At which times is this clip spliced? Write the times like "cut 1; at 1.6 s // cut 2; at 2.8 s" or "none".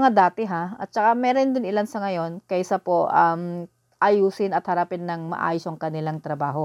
none